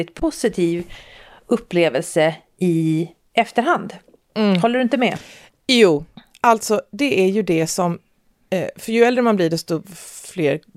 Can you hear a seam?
no; 0 cuts

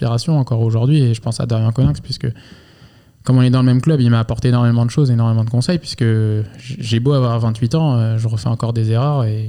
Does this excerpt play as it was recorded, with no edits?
yes; 0 cuts

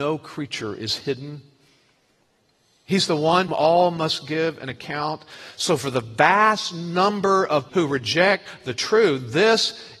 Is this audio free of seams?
no; 3 cuts; at 2.4 s, 3.5 s, 7.7 s

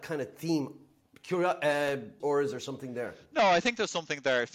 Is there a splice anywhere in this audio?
yes; 1 cut; at 2.2 s

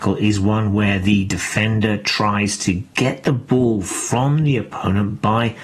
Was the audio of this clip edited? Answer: no; 0 cuts

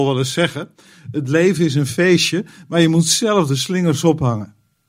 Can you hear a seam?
no; 0 cuts

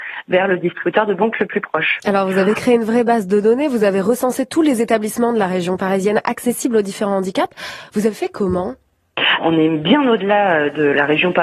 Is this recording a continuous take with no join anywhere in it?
no; 1 cut; at 9.4 s

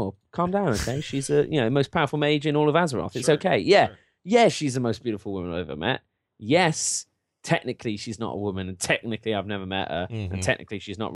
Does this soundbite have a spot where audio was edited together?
no; 0 cuts

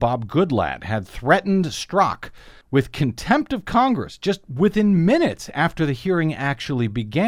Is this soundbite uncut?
no; 1 cut; at 2.6 s

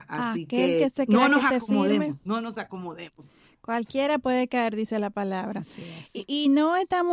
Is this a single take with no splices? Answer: yes; 0 cuts

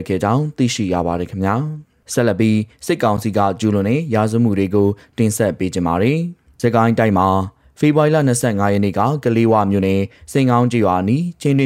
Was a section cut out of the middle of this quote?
no; 0 cuts

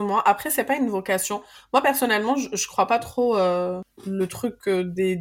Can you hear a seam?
no; 0 cuts

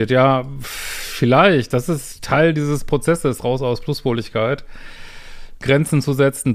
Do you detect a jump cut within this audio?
no; 0 cuts

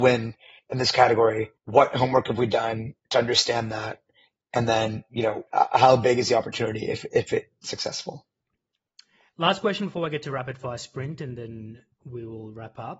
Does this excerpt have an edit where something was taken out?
yes; 3 cuts; at 1.6 s, 3.0 s, 5.5 s

